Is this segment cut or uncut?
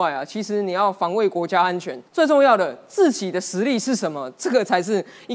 cut